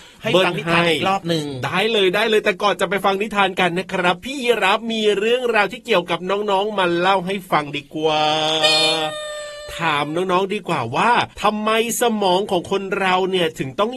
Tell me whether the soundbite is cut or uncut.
cut